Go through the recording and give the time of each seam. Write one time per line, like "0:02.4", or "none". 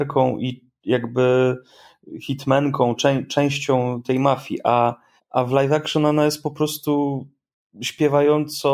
0:03.0
0:05.2
0:07.6